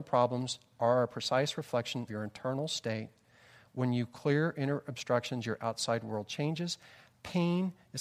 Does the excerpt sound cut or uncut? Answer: cut